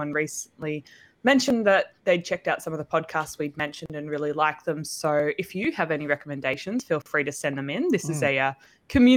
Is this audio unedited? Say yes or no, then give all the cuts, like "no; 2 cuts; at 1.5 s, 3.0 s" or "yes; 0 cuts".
no; 1 cut; at 2.0 s